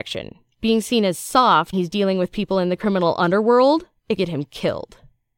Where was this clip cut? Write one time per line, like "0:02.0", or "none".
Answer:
0:01.7
0:04.2